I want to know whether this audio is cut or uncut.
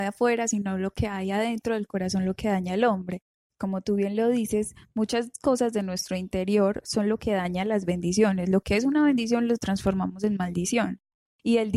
uncut